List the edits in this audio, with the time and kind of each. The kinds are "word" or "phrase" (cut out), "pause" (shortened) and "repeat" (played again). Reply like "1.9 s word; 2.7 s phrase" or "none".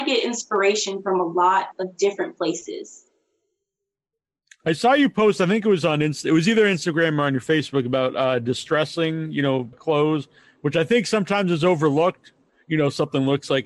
9.7 s word